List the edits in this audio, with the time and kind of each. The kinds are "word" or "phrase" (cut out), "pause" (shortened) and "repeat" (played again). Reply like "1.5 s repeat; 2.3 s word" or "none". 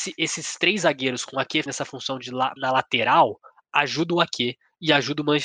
1.7 s word; 2.6 s word